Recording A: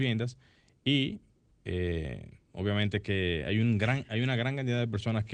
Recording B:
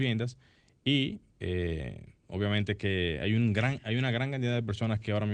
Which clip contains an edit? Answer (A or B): B